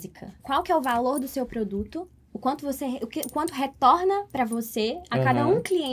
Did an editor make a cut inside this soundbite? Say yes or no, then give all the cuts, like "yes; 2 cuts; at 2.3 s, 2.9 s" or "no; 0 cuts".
no; 0 cuts